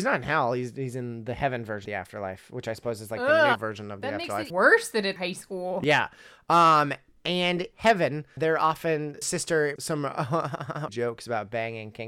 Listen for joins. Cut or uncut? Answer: cut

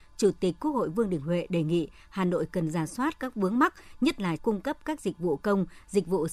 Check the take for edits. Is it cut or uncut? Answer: cut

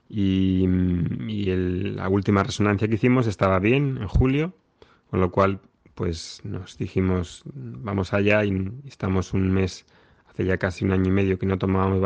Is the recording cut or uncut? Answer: uncut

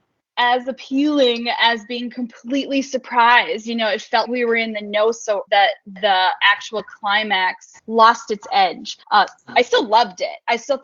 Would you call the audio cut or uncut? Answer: cut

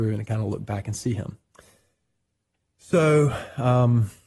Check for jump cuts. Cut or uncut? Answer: uncut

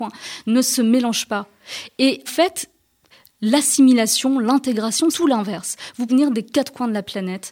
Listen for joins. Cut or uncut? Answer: cut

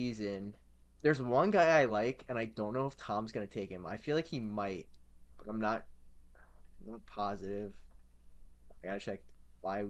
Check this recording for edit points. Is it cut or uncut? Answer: uncut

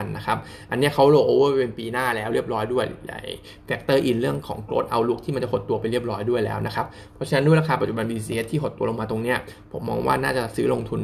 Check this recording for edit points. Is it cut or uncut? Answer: uncut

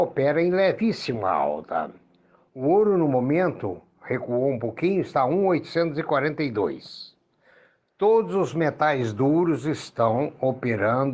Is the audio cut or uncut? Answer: uncut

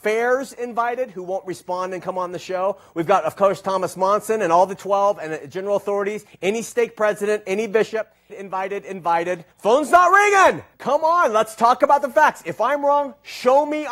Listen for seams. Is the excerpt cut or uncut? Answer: cut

